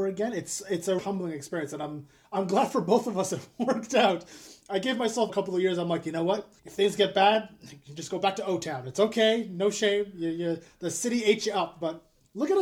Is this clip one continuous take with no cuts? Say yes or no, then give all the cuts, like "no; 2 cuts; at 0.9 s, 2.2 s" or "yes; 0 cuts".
no; 3 cuts; at 1.0 s, 5.3 s, 6.6 s